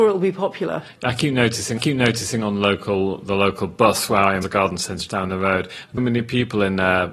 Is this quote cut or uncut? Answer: cut